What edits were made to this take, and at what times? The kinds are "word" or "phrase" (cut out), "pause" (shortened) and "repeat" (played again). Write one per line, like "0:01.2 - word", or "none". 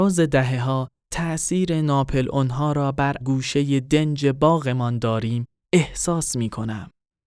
0:03.2 - phrase